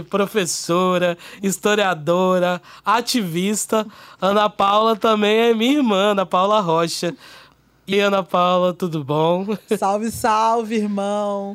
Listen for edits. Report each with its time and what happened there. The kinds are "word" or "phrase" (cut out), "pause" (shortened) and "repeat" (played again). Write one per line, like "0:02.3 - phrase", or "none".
0:07.9 - word